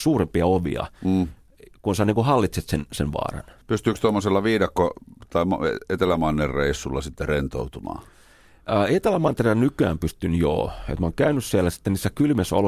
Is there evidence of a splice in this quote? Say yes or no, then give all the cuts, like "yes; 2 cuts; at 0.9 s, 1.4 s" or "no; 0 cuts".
yes; 1 cut; at 3.6 s